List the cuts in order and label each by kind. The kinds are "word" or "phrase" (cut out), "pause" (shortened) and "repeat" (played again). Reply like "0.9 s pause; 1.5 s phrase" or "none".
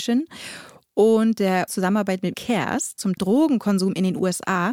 1.7 s phrase; 2.3 s word; 3.2 s word